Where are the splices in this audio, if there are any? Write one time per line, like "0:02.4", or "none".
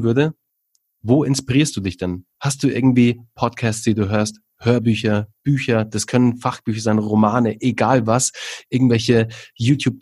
none